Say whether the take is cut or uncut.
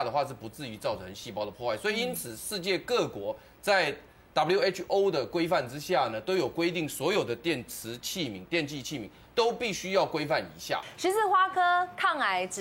uncut